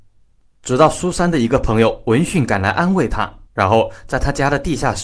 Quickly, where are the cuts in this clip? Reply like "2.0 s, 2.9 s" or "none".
3.5 s